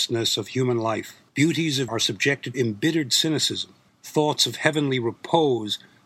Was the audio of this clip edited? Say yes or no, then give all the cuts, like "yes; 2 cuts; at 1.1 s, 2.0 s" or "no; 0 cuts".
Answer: yes; 4 cuts; at 1.3 s, 1.9 s, 2.5 s, 3.9 s